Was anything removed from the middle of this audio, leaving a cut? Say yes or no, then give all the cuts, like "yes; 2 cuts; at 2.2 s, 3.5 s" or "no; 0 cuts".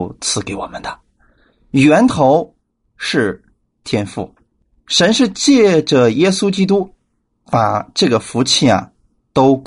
no; 0 cuts